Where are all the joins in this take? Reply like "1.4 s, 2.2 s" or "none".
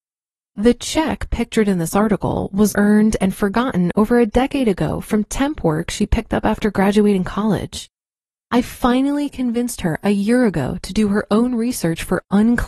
2.7 s